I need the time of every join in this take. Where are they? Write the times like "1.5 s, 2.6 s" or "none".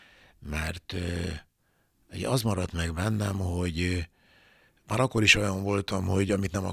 none